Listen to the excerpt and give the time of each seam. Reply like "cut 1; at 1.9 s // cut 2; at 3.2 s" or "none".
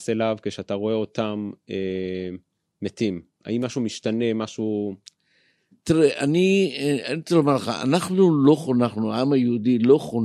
none